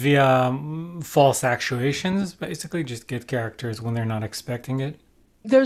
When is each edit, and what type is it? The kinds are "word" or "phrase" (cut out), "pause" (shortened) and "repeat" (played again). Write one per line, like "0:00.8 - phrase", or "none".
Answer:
none